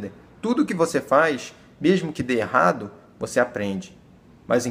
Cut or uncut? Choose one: uncut